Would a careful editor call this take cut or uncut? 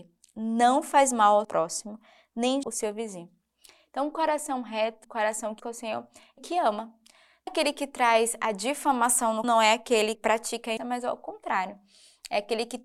cut